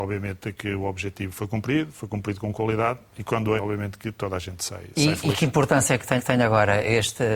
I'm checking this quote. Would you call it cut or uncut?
cut